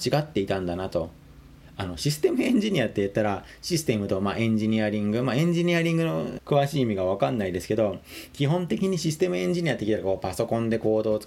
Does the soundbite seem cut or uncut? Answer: cut